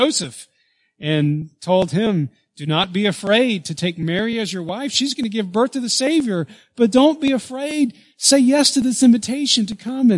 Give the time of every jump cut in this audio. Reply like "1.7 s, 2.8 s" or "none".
none